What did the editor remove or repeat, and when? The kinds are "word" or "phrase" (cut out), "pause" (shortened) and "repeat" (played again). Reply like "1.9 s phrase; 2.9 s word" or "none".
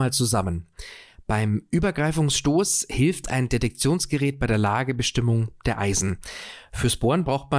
none